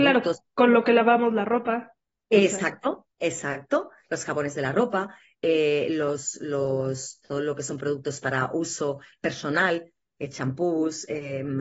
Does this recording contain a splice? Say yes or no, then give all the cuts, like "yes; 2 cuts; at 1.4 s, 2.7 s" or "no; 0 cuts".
no; 0 cuts